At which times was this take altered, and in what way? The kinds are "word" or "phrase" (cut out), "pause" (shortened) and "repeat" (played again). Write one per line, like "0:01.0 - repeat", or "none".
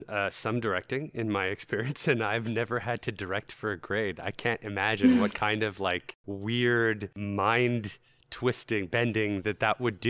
none